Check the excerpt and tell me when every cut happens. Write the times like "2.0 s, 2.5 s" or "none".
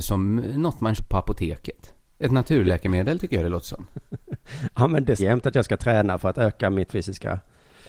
1.0 s, 5.2 s, 6.9 s

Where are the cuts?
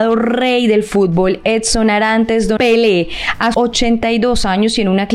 2.6 s, 3.5 s

